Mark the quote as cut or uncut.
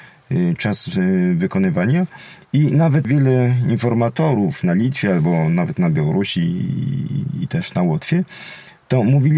uncut